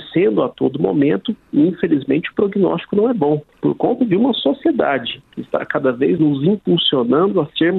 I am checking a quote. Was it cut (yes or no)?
yes